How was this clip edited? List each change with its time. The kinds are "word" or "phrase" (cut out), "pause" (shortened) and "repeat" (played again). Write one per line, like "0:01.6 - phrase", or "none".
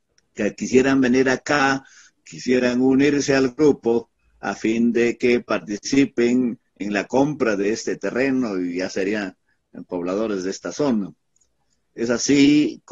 none